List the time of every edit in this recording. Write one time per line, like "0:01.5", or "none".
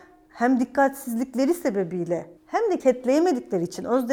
0:02.4
0:02.8